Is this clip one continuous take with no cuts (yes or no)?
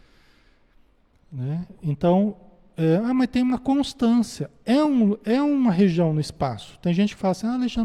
yes